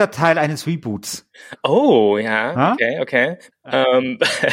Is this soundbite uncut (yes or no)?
yes